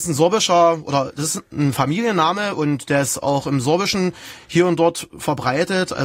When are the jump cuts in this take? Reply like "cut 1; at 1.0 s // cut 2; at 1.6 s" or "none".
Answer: none